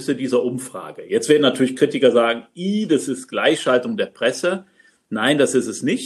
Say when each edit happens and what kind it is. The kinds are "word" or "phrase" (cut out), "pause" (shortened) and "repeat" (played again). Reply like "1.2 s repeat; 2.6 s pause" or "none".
none